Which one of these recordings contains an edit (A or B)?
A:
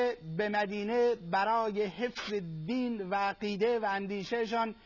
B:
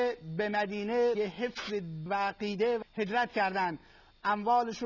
B